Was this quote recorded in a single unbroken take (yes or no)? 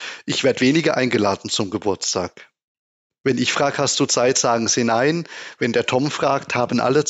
yes